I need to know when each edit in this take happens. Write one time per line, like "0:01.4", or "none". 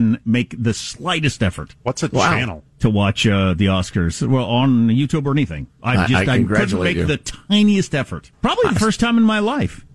0:05.7
0:08.3